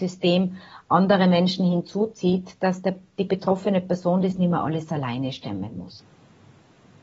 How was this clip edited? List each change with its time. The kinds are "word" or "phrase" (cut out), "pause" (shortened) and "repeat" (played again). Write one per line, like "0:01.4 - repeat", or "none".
none